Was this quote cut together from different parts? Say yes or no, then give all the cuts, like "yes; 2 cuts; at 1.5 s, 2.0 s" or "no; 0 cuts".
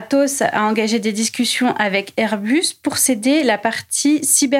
no; 0 cuts